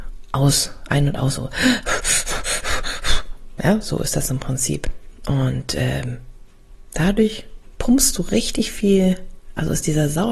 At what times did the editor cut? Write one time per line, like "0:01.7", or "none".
none